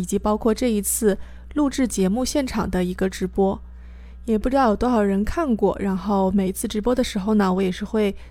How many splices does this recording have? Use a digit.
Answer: 0